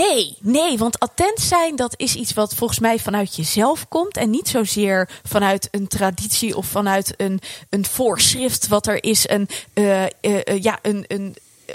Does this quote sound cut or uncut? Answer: uncut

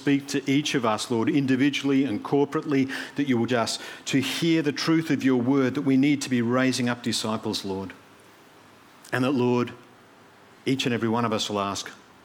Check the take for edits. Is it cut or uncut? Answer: cut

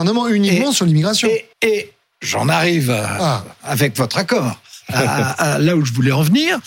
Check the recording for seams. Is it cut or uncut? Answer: cut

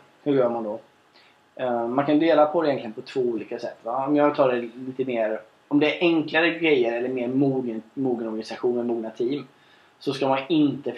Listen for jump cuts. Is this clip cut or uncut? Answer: uncut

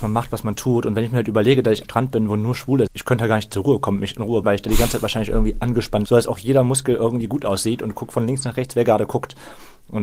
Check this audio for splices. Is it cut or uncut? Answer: cut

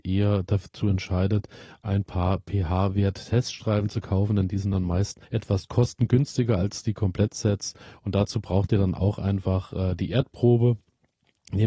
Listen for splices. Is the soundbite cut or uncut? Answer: cut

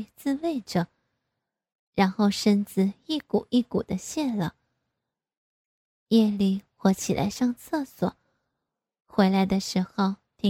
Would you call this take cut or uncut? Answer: uncut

